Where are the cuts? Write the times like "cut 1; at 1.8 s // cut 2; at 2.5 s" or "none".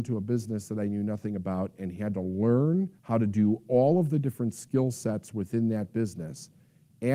cut 1; at 3.0 s